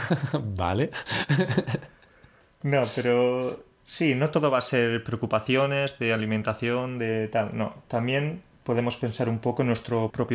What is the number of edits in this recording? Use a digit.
0